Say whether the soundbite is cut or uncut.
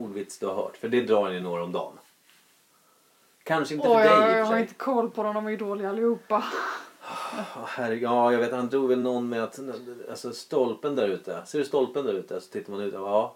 uncut